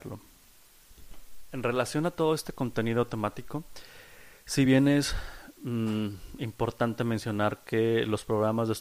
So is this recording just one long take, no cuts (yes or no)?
yes